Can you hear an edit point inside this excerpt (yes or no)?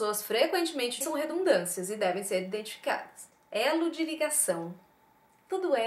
yes